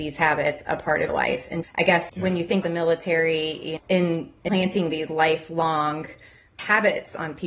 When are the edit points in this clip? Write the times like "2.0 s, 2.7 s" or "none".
1.1 s, 1.6 s, 2.1 s, 2.6 s, 3.8 s, 5.1 s